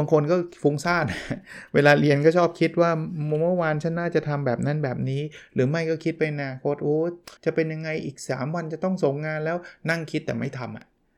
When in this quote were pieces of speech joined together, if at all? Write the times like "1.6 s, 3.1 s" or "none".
7.4 s